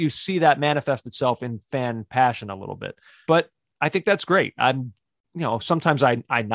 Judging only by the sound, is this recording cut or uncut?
cut